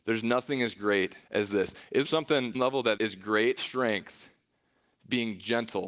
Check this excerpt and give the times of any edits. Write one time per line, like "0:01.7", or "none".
0:01.3
0:02.0
0:02.5
0:03.0
0:03.6